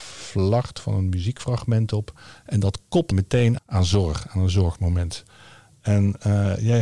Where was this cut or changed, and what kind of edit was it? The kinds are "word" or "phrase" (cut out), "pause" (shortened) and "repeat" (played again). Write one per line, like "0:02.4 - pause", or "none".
0:03.1 - word
0:03.6 - word